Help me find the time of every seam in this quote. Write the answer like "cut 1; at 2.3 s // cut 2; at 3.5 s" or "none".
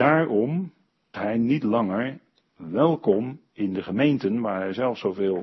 cut 1; at 1.1 s